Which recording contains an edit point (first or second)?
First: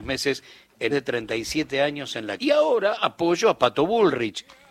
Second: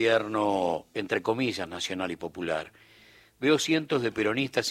first